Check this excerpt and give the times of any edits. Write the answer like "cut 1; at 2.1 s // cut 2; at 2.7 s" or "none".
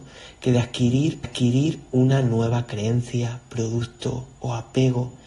cut 1; at 1.2 s